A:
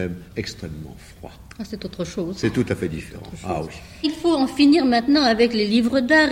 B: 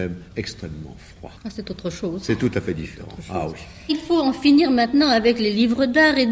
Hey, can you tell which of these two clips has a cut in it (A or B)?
B